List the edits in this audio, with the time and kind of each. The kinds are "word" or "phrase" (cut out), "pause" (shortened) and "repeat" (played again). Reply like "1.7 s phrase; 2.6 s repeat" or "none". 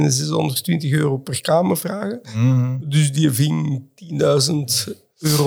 none